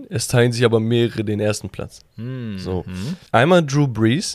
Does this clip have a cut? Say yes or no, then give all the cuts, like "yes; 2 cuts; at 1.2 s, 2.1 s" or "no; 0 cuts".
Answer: yes; 2 cuts; at 2.1 s, 3.3 s